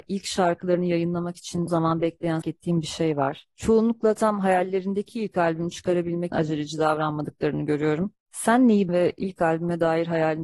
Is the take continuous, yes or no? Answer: no